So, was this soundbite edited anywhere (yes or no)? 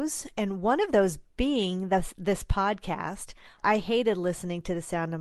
no